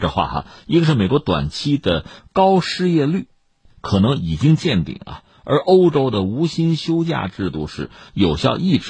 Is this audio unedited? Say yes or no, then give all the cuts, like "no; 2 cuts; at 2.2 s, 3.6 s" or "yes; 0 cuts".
yes; 0 cuts